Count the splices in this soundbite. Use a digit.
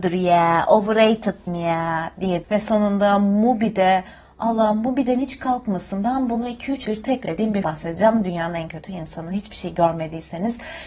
5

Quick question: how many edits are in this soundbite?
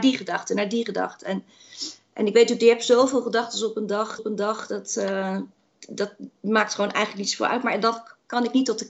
1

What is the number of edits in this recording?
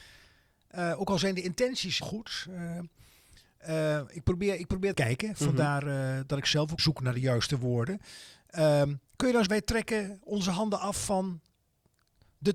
5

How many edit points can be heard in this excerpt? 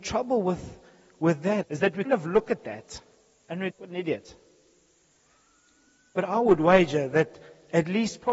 3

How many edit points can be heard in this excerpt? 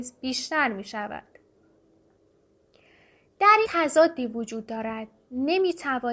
1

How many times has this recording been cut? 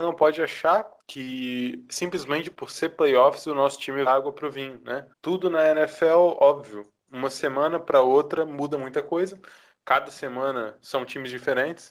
3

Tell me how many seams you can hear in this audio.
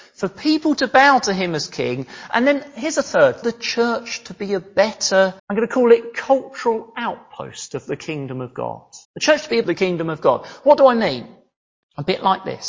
4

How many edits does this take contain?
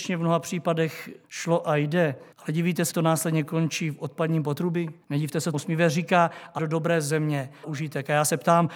7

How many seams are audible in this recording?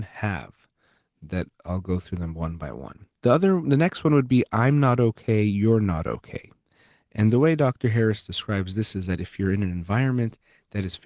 1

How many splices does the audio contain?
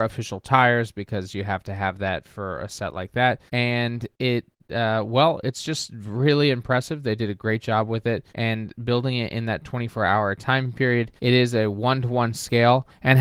3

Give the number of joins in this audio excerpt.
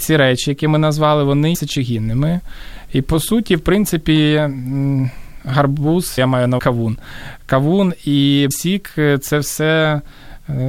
4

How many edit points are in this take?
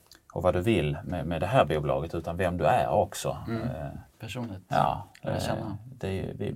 1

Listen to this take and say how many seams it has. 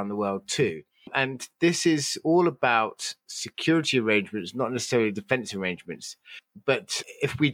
0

